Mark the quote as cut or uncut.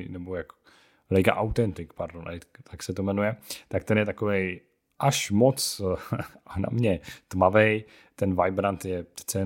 uncut